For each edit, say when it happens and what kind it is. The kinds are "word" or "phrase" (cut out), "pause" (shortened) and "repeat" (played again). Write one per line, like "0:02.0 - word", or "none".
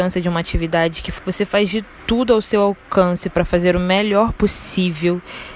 0:01.2 - phrase